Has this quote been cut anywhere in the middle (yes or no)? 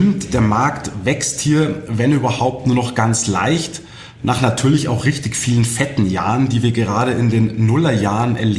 no